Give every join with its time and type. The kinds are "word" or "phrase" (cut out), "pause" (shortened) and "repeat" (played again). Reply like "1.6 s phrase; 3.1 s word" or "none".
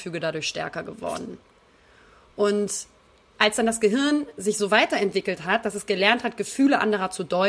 none